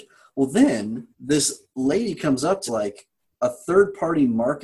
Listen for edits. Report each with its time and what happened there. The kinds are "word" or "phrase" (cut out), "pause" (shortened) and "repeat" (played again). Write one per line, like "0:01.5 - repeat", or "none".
0:01.1 - pause
0:02.7 - phrase